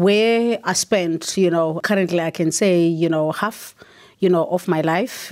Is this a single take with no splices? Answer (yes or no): yes